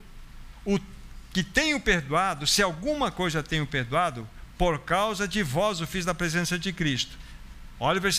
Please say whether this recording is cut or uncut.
uncut